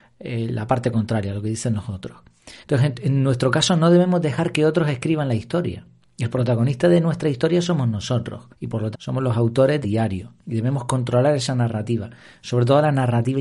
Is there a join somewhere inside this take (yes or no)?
yes